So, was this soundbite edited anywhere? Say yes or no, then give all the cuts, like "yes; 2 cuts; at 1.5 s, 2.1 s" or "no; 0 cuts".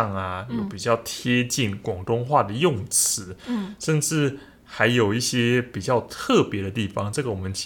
no; 0 cuts